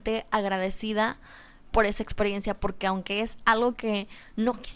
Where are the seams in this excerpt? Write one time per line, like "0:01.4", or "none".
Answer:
none